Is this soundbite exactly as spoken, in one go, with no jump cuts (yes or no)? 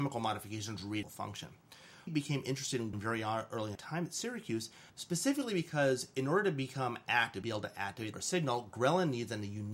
no